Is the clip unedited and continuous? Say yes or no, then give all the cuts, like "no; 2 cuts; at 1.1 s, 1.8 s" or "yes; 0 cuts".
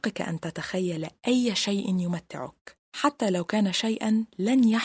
no; 1 cut; at 2.8 s